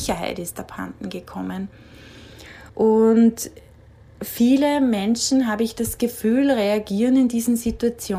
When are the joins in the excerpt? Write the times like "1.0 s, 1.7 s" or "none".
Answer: 2.7 s